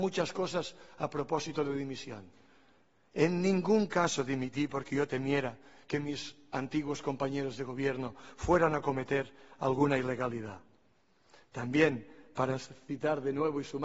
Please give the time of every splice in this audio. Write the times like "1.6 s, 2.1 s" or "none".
none